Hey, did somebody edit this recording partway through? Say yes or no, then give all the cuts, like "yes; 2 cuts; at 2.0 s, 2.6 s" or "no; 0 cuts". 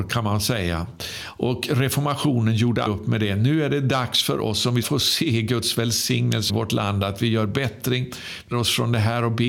yes; 4 cuts; at 2.9 s, 4.8 s, 6.5 s, 8.5 s